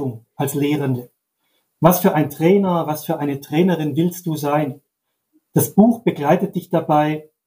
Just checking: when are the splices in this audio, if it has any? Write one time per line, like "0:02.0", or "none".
none